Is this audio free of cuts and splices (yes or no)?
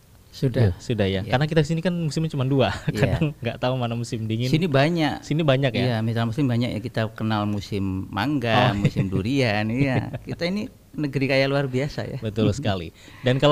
no